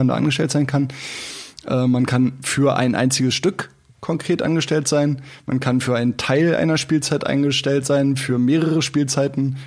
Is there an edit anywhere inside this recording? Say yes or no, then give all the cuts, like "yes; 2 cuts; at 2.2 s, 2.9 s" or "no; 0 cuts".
no; 0 cuts